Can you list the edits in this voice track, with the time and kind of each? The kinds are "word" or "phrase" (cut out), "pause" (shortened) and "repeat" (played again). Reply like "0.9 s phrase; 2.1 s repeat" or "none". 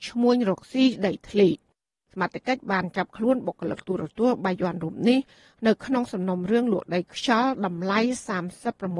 none